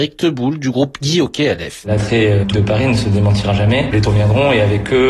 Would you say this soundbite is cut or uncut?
cut